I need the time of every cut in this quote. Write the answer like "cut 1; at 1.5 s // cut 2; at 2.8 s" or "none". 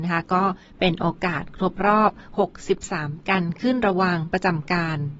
cut 1; at 3.2 s